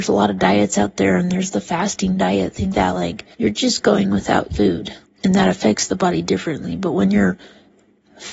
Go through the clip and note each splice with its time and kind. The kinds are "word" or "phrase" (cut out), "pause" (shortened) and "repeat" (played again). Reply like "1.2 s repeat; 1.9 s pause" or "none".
2.7 s word; 3.3 s pause; 4.5 s word; 5.0 s word